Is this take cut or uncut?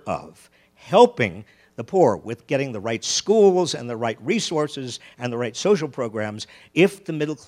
uncut